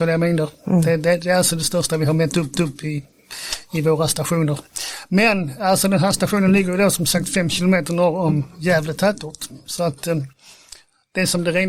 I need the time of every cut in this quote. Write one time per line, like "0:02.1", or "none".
0:02.5